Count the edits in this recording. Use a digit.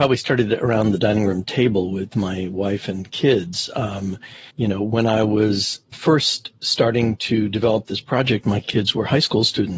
2